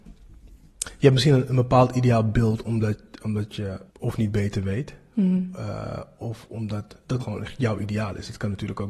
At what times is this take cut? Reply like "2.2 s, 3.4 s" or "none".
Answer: 3.9 s, 7.2 s